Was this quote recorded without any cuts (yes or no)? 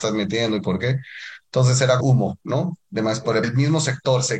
no